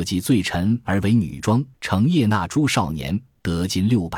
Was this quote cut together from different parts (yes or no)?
yes